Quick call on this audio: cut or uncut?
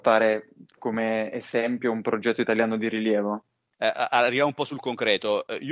uncut